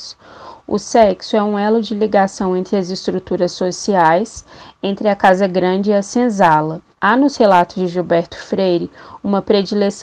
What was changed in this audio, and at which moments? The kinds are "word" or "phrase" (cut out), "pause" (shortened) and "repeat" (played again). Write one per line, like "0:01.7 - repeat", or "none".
0:06.9 - pause